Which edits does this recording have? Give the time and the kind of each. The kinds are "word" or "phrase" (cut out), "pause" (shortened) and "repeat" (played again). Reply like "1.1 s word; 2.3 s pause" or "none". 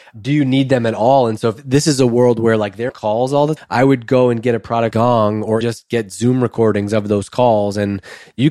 2.9 s word; 3.6 s word; 4.9 s word; 5.6 s word